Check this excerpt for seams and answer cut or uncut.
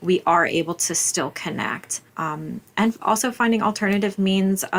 cut